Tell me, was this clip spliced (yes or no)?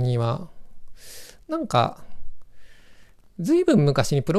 no